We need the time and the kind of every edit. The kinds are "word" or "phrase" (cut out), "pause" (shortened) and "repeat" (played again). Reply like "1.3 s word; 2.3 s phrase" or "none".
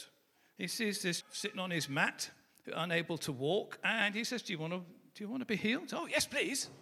1.2 s word